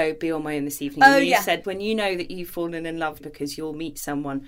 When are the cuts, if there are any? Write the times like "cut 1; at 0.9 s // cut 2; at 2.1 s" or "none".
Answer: cut 1; at 1.6 s // cut 2; at 2.5 s // cut 3; at 3.2 s